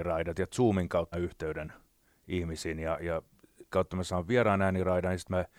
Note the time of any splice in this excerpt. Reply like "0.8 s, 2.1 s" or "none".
1.1 s, 3.7 s